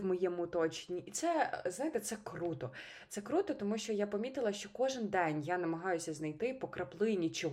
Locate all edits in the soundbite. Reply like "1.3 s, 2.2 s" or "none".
none